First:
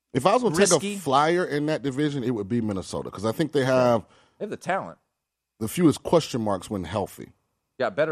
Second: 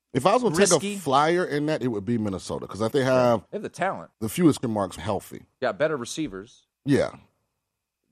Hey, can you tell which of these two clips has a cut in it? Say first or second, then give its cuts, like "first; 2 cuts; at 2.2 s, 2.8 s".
second; 8 cuts; at 1.8 s, 2.9 s, 3.5 s, 4.1 s, 4.6 s, 5.0 s, 5.5 s, 6.7 s